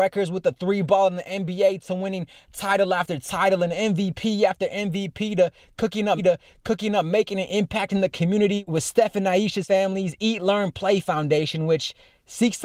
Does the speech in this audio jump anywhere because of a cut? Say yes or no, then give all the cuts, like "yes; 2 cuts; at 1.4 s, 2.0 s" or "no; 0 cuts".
yes; 1 cut; at 6.2 s